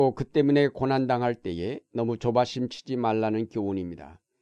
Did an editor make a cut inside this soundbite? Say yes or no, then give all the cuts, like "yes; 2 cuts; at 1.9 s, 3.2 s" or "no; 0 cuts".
no; 0 cuts